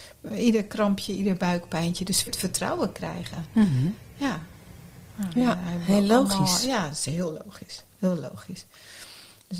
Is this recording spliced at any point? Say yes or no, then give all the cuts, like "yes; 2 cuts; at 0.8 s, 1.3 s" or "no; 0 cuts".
yes; 1 cut; at 2.3 s